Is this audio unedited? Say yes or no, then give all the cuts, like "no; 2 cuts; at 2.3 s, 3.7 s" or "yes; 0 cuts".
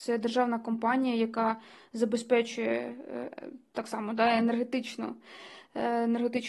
yes; 0 cuts